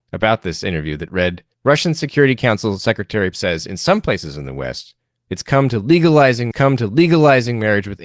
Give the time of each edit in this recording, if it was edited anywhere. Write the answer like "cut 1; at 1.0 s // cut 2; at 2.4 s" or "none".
cut 1; at 1.5 s // cut 2; at 3.3 s // cut 3; at 6.5 s